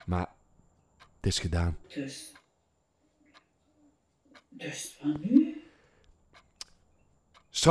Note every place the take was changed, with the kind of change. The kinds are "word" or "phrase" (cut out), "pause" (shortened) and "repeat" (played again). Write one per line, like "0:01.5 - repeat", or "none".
0:01.8 - pause